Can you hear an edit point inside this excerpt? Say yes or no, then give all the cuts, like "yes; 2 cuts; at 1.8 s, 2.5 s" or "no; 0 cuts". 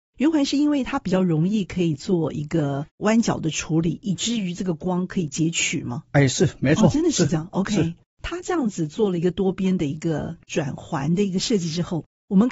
no; 0 cuts